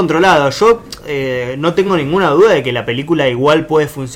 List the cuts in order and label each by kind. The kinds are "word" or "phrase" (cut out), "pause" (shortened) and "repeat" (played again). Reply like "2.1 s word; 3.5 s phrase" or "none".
none